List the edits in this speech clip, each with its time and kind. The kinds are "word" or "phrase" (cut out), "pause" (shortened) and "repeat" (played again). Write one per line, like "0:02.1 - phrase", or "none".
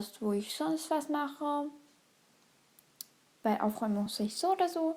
none